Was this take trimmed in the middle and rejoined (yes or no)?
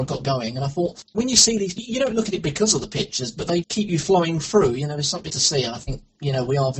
yes